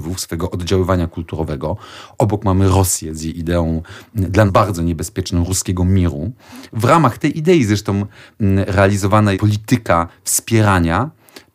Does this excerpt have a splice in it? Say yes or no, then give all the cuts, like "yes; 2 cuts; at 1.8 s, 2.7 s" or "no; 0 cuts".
yes; 2 cuts; at 4.5 s, 9.3 s